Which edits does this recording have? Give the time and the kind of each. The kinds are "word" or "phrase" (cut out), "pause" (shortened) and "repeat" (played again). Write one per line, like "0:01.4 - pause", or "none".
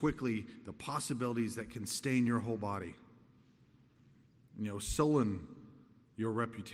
none